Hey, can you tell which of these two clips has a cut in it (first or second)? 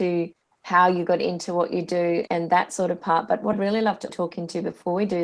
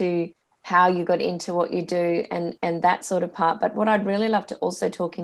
first